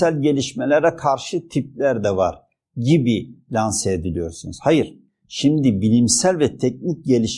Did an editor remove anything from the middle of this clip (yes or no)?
no